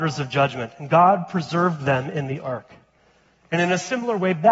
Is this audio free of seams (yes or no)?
yes